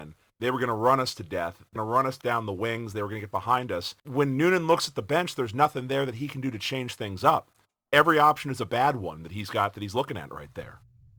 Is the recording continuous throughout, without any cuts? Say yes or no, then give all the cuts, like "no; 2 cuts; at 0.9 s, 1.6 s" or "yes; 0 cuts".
no; 3 cuts; at 1.8 s, 2.2 s, 4.0 s